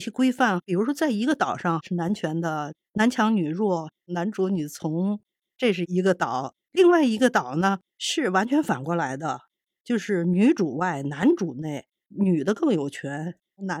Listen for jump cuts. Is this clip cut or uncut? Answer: cut